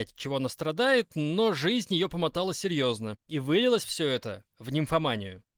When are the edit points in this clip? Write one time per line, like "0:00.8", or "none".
0:03.2
0:04.5